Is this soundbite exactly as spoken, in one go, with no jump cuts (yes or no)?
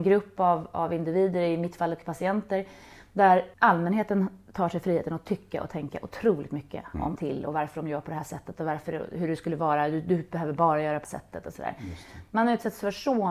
no